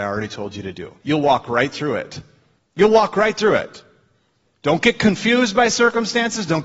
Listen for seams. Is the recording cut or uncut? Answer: cut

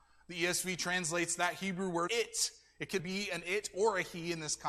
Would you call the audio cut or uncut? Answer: cut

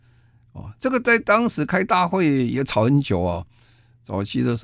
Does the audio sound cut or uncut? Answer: uncut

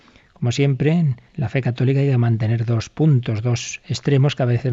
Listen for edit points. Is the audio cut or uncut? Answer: cut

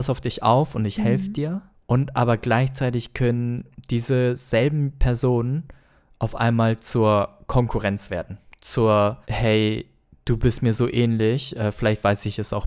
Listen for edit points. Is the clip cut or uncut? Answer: cut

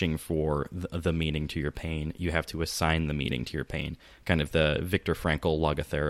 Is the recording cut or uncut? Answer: uncut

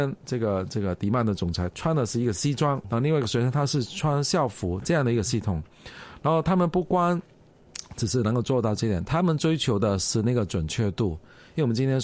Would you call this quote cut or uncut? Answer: cut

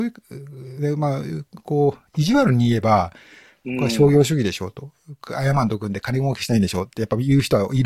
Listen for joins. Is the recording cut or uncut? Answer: uncut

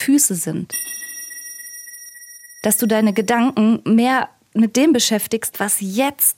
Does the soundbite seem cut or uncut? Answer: uncut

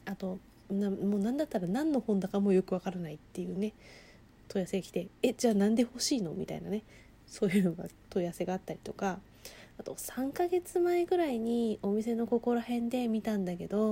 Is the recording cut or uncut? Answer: uncut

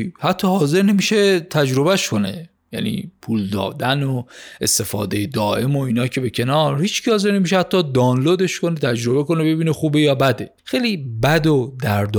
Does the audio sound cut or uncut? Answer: cut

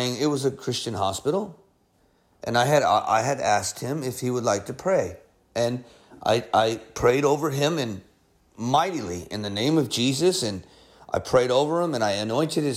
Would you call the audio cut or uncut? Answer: uncut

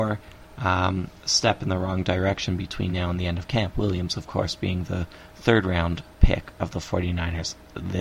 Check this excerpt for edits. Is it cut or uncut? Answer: uncut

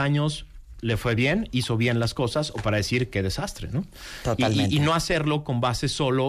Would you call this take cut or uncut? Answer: uncut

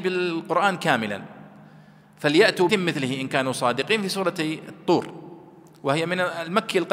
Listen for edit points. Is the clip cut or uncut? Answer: cut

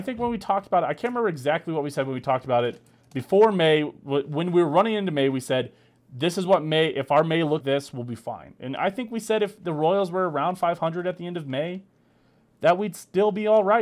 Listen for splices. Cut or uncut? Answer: cut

